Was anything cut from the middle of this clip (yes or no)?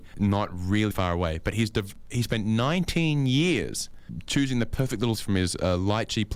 yes